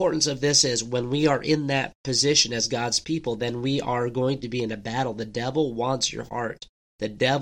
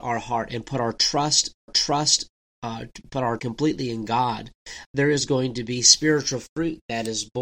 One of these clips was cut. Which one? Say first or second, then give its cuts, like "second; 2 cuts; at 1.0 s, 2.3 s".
second; 3 cuts; at 1.7 s, 3.4 s, 4.8 s